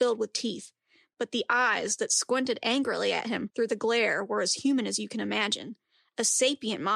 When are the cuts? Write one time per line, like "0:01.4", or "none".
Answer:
none